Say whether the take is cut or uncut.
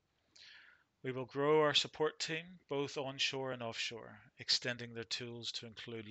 uncut